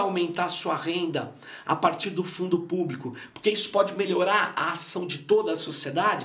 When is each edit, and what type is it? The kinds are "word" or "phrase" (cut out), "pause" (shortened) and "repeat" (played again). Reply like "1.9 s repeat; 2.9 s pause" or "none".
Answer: none